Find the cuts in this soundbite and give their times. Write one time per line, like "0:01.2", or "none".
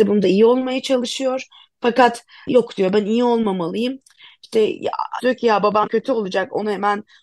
0:02.5
0:05.2
0:05.9